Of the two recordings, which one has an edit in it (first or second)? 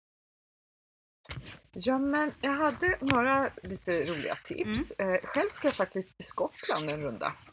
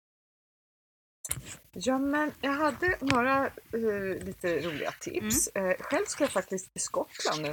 first